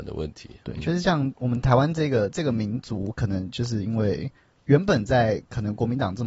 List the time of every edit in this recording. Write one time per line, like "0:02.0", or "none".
none